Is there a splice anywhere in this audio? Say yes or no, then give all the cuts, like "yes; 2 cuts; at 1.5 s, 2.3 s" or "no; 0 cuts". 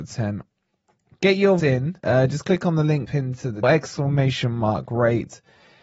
yes; 4 cuts; at 1.6 s, 2.0 s, 3.1 s, 3.6 s